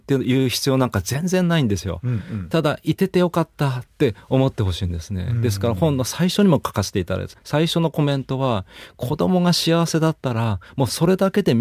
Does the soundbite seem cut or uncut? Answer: cut